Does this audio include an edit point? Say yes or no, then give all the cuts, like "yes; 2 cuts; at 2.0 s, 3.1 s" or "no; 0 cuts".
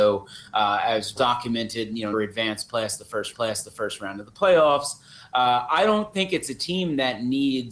yes; 3 cuts; at 1.2 s, 2.1 s, 3.3 s